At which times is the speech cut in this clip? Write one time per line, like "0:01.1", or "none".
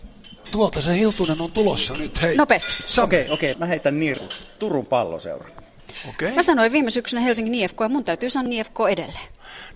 0:03.5
0:04.2
0:08.5